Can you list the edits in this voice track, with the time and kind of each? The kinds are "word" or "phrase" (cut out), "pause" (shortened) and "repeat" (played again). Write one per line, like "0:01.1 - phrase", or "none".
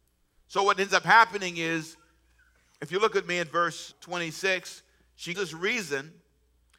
0:03.9 - word
0:05.3 - word